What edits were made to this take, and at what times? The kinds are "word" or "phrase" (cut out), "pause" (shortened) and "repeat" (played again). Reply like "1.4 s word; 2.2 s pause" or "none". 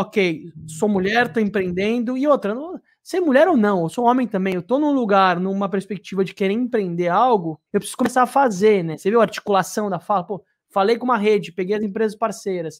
7.7 s pause